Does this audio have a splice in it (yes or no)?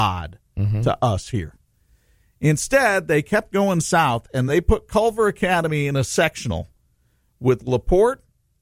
no